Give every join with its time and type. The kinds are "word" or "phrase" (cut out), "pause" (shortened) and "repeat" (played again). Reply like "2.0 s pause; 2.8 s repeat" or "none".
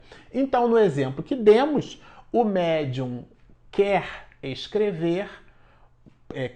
none

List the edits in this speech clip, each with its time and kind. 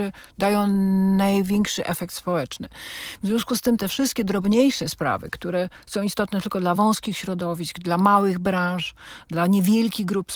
none

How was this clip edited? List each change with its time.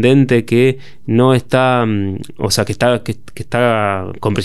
none

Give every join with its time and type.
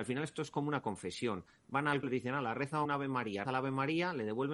2.0 s word; 2.8 s word; 3.4 s word

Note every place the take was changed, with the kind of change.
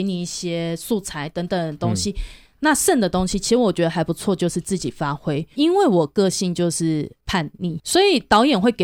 7.8 s word

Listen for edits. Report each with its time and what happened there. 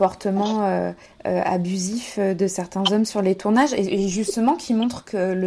1.1 s pause

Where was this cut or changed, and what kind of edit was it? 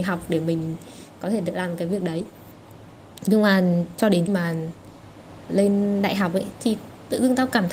4.3 s word; 6.5 s word

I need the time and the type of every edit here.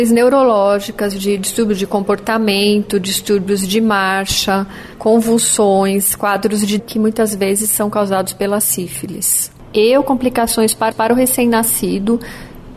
6.8 s word; 10.9 s repeat

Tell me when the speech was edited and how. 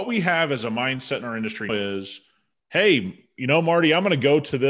1.7 s word

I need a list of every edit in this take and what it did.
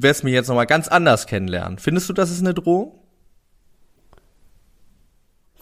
none

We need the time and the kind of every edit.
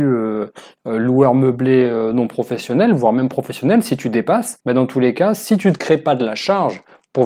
4.6 s pause

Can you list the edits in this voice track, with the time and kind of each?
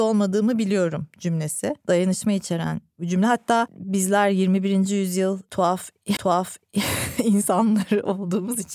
1.8 s pause; 6.2 s repeat

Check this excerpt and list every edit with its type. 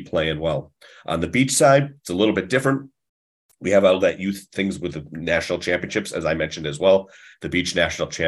2.0 s pause

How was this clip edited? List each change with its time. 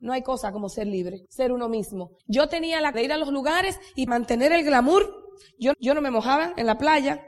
1.3 s pause; 2.2 s pause; 2.9 s word; 4.1 s word; 5.7 s repeat

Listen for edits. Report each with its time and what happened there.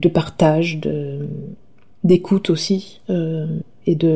none

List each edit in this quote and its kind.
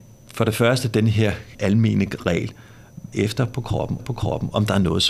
1.5 s word; 3.1 s word; 4.0 s repeat

